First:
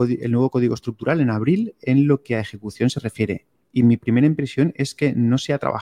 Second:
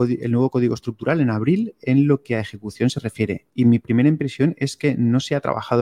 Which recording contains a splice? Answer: second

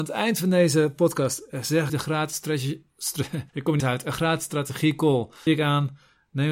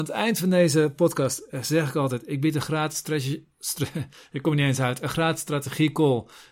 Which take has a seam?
first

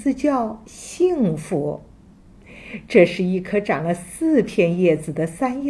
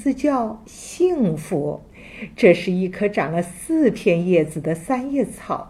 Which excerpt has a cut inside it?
second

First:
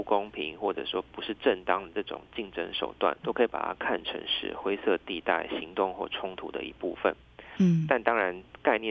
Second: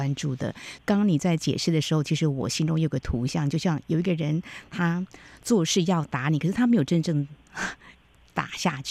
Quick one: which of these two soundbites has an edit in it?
first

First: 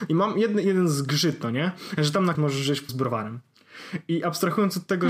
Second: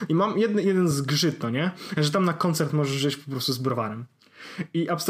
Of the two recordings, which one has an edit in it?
first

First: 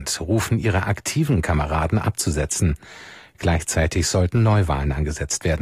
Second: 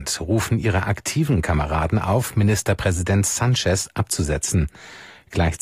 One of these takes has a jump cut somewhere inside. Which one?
first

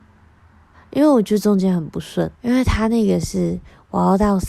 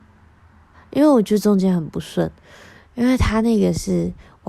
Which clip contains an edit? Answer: first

